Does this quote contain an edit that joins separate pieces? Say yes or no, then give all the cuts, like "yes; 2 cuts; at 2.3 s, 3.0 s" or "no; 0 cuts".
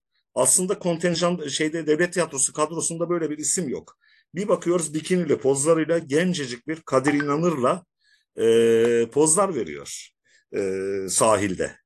no; 0 cuts